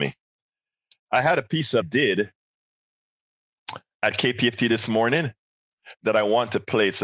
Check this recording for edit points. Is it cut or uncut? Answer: cut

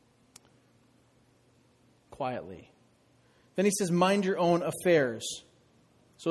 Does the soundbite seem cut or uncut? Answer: uncut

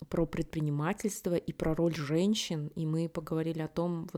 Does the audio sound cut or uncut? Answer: uncut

